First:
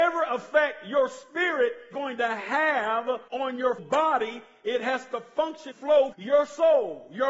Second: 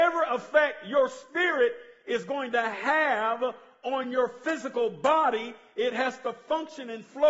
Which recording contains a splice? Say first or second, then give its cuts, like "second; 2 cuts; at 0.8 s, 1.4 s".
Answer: first; 5 cuts; at 1.9 s, 3.3 s, 3.8 s, 5.7 s, 6.1 s